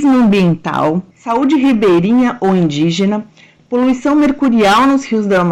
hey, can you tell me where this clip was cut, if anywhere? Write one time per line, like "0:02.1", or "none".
0:01.1